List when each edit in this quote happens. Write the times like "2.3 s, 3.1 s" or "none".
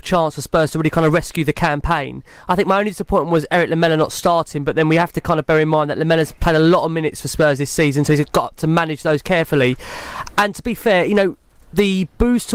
none